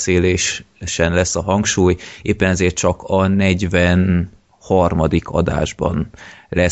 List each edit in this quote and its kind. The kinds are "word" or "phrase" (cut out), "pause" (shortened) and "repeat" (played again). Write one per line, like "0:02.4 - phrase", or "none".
none